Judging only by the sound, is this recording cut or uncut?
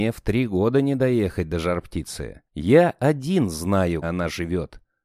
cut